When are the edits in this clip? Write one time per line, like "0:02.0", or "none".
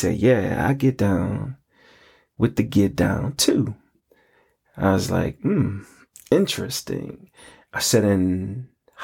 none